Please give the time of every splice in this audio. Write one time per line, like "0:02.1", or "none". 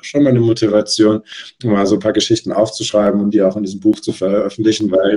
none